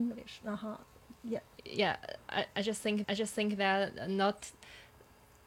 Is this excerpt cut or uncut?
cut